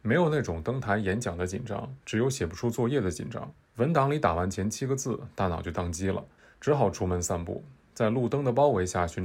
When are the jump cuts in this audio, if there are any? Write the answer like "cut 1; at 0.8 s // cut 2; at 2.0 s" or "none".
cut 1; at 2.0 s // cut 2; at 3.6 s // cut 3; at 6.4 s

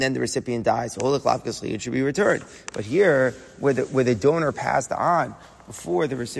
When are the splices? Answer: none

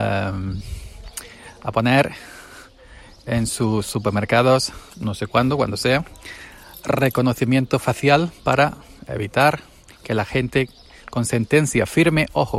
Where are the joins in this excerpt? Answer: cut 1; at 4.9 s

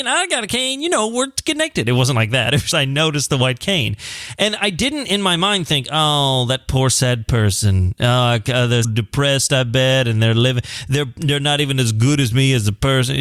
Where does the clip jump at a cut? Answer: cut 1; at 2.7 s // cut 2; at 8.8 s

